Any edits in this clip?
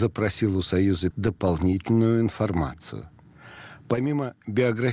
yes; 1 cut; at 1.1 s

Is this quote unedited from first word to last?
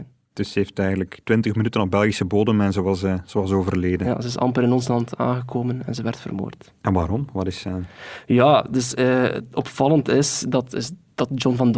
no; 1 cut; at 1.2 s

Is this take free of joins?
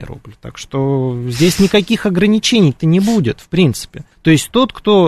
no; 1 cut; at 4.1 s

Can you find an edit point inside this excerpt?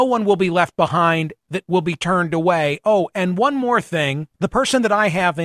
yes; 2 cuts; at 1.6 s, 4.3 s

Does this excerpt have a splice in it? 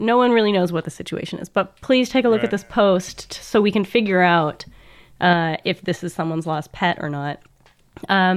no; 0 cuts

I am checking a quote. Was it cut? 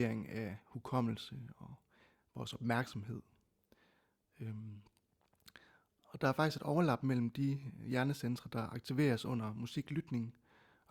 no; 0 cuts

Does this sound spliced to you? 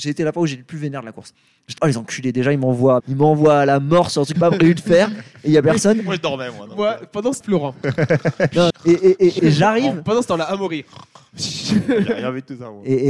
yes; 6 cuts; at 1.8 s, 3.0 s, 4.4 s, 7.4 s, 8.7 s, 9.4 s

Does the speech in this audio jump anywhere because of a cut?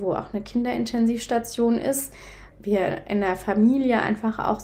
yes; 1 cut; at 2.5 s

